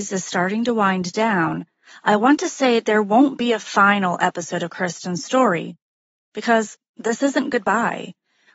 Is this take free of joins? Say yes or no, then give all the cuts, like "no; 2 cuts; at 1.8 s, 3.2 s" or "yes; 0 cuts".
yes; 0 cuts